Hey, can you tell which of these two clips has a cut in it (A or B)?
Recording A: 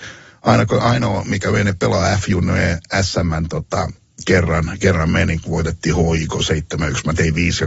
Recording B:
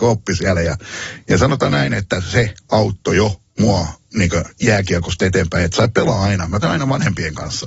B